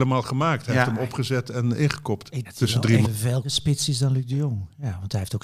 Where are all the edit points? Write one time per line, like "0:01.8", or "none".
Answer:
0:02.4
0:03.0
0:03.4